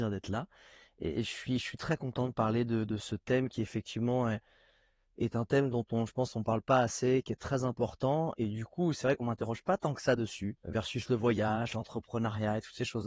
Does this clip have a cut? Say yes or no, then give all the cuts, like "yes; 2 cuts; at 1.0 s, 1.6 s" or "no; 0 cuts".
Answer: no; 0 cuts